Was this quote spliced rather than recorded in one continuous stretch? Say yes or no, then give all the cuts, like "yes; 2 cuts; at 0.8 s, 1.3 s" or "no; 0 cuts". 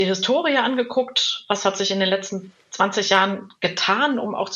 no; 0 cuts